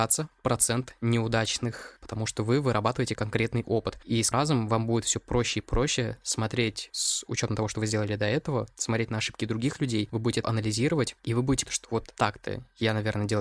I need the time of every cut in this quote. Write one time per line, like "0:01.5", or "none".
0:02.0
0:03.2
0:04.3
0:10.4
0:11.7